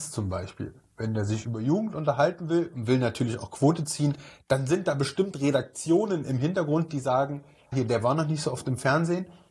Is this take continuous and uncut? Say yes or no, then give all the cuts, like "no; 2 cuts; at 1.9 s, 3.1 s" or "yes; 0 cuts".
no; 1 cut; at 7.7 s